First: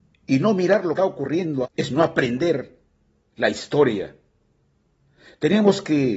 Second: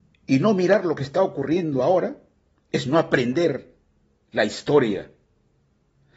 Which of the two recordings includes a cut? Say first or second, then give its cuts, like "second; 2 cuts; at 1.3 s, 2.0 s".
first; 2 cuts; at 1.0 s, 1.6 s